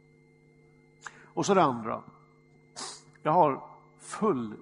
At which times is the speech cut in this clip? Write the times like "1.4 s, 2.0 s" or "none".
none